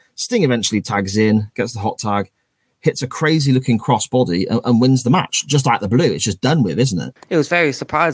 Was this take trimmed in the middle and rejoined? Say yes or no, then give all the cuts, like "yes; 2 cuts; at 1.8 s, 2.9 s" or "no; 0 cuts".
no; 0 cuts